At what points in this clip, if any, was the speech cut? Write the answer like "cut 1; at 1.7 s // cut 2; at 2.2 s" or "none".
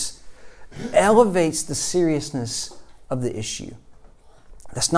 none